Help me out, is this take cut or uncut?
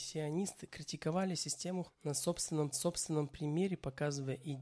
cut